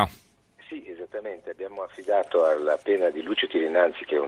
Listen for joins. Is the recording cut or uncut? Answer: uncut